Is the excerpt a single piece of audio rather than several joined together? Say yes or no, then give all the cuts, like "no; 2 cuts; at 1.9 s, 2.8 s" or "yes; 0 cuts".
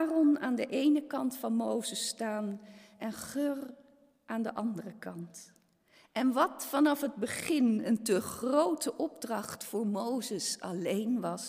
yes; 0 cuts